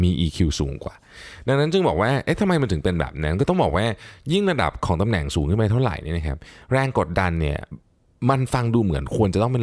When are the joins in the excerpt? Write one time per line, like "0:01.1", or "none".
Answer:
none

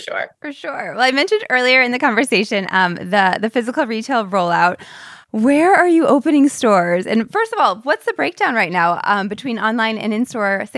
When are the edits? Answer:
0:05.2

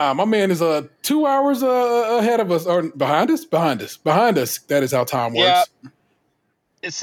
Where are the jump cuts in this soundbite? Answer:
none

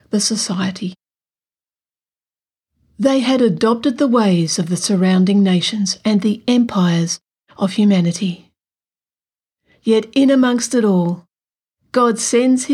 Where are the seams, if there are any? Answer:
none

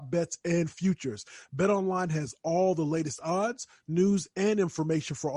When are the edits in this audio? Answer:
none

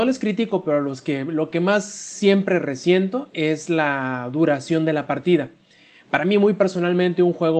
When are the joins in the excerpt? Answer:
none

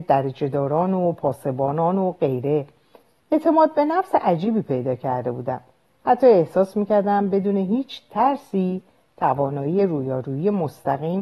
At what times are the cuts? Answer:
none

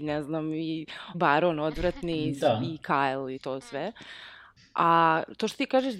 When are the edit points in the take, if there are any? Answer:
0:01.1
0:03.4

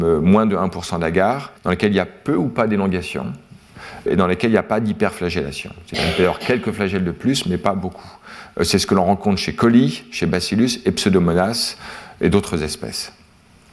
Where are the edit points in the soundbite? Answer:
0:01.6
0:04.1

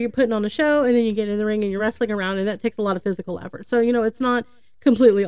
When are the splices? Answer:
none

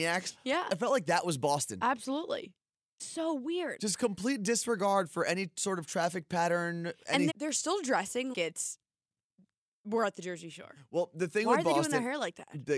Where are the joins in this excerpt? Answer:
0:03.0
0:07.3
0:08.3

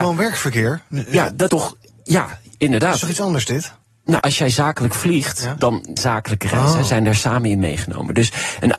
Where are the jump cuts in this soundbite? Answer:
0:01.5
0:04.2
0:06.0

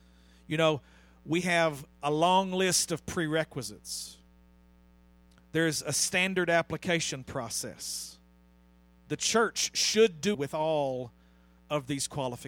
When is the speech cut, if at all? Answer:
0:10.3

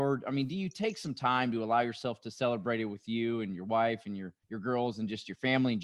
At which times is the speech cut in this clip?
0:04.4

